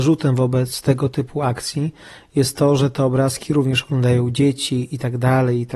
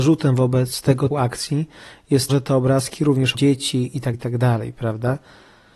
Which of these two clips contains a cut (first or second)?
second